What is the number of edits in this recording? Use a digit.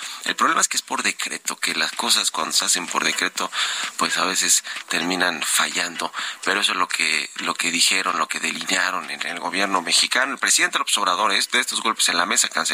0